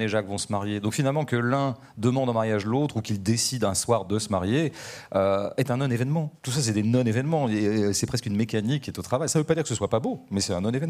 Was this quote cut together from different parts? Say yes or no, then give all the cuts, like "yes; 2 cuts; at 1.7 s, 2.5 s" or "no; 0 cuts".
yes; 1 cut; at 6.4 s